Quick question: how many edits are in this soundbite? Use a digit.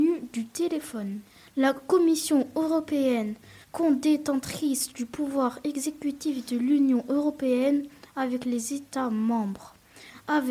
1